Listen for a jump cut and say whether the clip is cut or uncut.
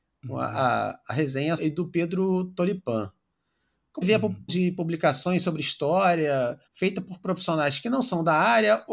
cut